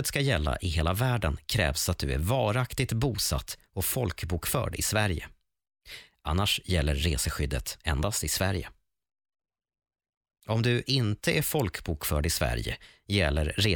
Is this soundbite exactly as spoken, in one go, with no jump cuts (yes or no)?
yes